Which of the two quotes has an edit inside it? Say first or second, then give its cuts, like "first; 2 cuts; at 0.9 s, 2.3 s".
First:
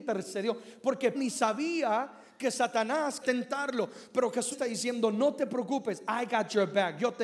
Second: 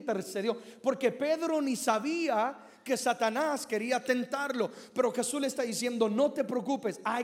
first; 3 cuts; at 1.1 s, 3.2 s, 4.5 s